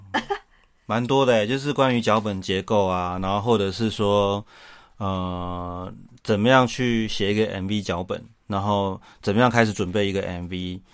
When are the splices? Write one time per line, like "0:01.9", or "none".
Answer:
none